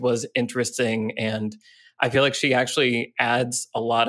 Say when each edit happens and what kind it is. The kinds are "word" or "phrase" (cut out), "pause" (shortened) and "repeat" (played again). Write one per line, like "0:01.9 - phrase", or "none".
none